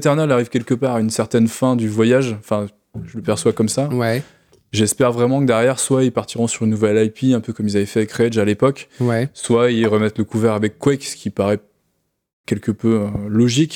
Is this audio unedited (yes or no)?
yes